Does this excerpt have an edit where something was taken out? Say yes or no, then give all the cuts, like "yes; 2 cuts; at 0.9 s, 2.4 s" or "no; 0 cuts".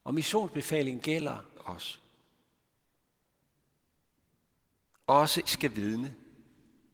yes; 3 cuts; at 1.0 s, 1.6 s, 5.5 s